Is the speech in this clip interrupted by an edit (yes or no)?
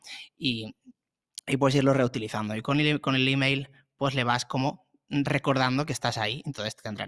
no